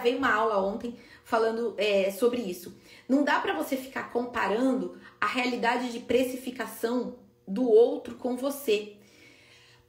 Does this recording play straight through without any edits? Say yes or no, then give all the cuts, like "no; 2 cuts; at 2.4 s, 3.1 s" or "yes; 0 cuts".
yes; 0 cuts